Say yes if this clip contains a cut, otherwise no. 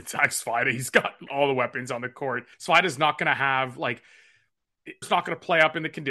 yes